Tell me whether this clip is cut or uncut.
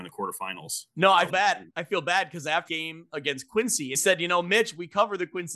cut